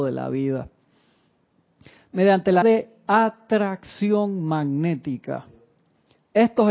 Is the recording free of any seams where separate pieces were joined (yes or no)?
no